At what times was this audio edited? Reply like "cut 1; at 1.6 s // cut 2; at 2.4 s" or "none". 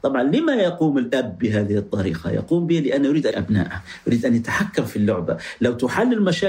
cut 1; at 3.3 s